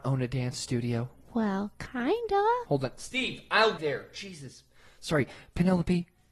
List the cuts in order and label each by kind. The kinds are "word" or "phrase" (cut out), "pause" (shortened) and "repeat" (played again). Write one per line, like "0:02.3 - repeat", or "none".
0:03.8 - word